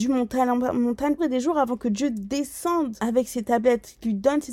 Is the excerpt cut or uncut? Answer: cut